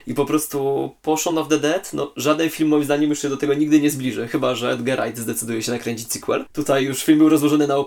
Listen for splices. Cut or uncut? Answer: uncut